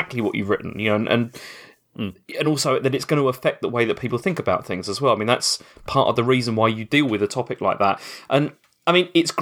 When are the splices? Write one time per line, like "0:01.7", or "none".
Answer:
none

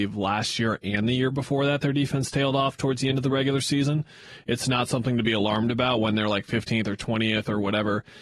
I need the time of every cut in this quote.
none

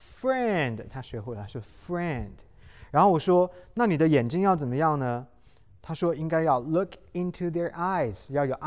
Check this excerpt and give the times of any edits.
none

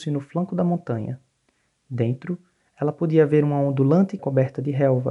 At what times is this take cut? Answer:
0:04.2

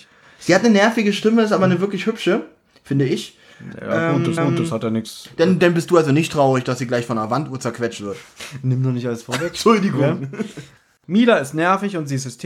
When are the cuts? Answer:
0:04.4

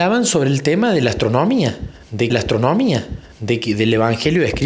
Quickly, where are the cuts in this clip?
0:02.3

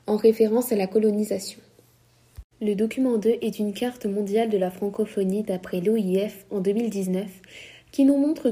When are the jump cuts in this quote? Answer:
0:02.5

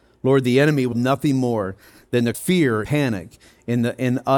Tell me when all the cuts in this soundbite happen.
0:00.9
0:02.3
0:02.8

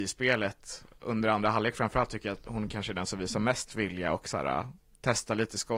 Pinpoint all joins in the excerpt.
none

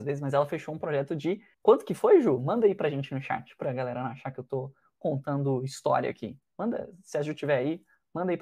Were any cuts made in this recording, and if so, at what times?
0:01.5
0:06.5

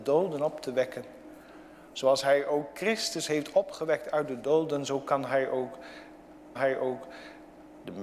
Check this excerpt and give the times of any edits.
0:06.6

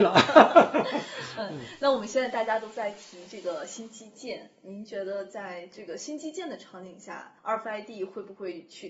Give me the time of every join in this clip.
0:07.4

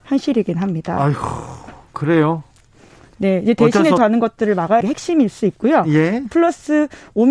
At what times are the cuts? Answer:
0:04.0
0:04.8

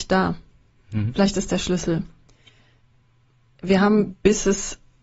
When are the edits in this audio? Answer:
0:01.5

